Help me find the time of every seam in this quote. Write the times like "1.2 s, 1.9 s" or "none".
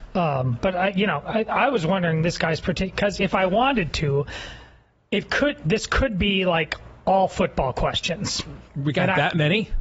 7.0 s, 8.7 s